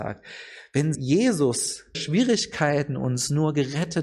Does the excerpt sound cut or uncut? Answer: cut